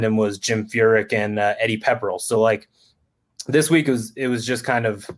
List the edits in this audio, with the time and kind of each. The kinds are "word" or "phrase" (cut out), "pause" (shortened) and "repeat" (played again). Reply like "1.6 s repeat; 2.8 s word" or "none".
none